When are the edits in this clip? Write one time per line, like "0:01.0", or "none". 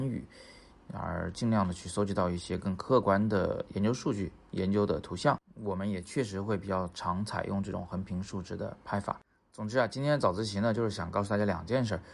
none